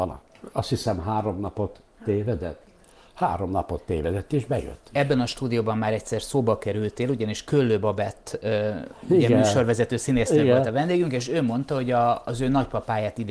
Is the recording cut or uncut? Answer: uncut